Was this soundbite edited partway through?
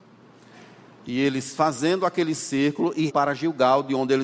yes; 1 cut; at 3.1 s

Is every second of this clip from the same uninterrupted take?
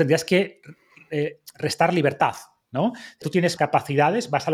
no; 2 cuts; at 3.2 s, 3.6 s

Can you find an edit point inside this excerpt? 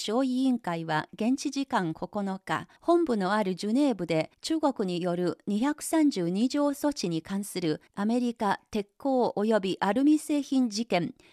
yes; 3 cuts; at 2.8 s, 4.3 s, 7.9 s

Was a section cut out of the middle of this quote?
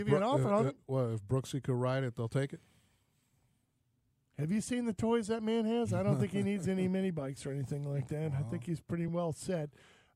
no; 0 cuts

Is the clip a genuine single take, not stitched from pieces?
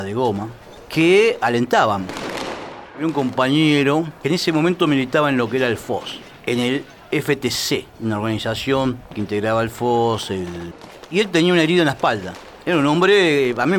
no; 1 cut; at 4.2 s

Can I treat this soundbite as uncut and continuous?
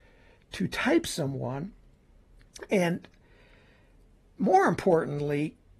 yes; 0 cuts

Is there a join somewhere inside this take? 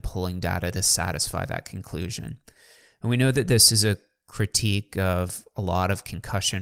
no; 0 cuts

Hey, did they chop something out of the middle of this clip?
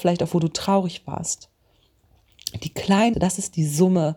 yes; 1 cut; at 3.1 s

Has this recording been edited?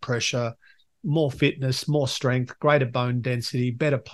no; 0 cuts

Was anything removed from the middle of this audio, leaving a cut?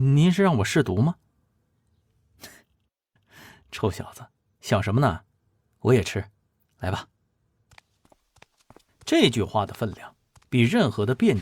no; 0 cuts

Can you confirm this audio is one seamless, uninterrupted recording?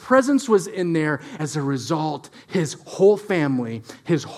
no; 1 cut; at 1.4 s

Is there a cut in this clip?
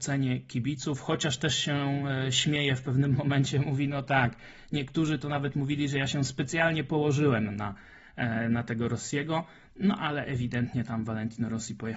no; 0 cuts

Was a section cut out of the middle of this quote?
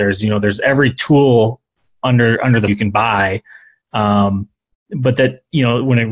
yes; 1 cut; at 2.7 s

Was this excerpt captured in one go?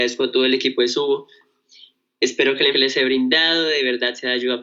no; 1 cut; at 2.7 s

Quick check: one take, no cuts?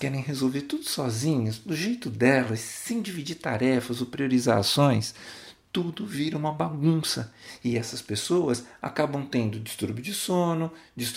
yes; 0 cuts

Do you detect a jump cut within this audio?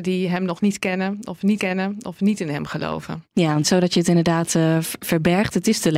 yes; 2 cuts; at 1.6 s, 3.6 s

